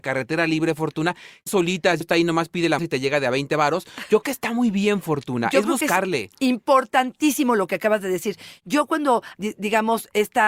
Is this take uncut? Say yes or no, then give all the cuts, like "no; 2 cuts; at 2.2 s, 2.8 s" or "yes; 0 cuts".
no; 5 cuts; at 1.5 s, 2.0 s, 2.8 s, 4.2 s, 9.3 s